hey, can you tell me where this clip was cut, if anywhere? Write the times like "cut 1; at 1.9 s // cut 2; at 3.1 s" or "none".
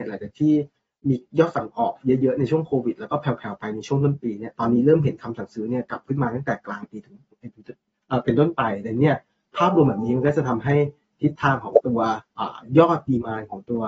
cut 1; at 12.3 s